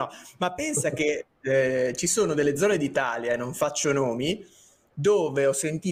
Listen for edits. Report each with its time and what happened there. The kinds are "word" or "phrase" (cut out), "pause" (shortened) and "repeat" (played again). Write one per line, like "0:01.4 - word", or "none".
none